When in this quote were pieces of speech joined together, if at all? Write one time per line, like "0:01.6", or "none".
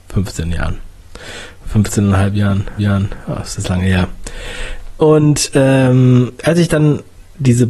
0:02.8
0:06.3